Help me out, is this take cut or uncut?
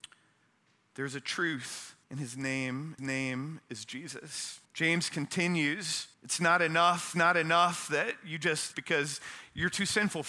cut